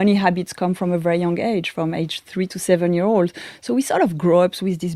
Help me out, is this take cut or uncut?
uncut